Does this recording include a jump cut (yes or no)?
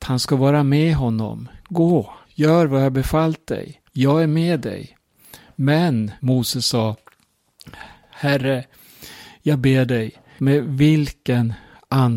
yes